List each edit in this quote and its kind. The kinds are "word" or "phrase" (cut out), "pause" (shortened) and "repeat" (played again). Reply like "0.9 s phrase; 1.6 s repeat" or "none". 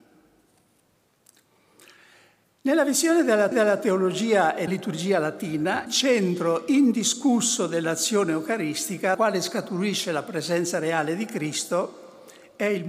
3.5 s repeat; 4.7 s word; 5.9 s word; 9.1 s word